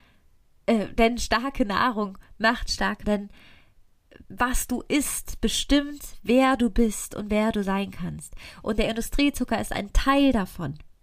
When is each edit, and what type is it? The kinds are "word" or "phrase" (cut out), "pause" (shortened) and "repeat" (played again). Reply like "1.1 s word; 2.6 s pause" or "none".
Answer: 3.0 s word; 4.2 s pause